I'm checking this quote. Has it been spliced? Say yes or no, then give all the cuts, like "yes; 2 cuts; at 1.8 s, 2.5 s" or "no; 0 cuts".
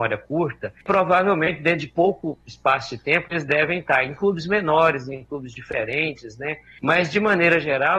no; 0 cuts